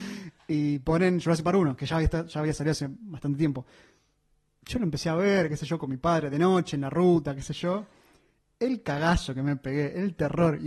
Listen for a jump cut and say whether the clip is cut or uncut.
uncut